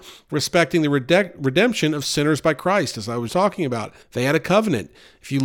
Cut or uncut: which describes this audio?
cut